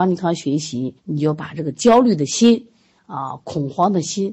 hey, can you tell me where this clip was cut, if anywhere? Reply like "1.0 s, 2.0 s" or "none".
1.0 s